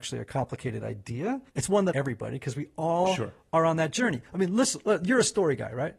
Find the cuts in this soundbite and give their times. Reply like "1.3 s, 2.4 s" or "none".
1.5 s, 1.9 s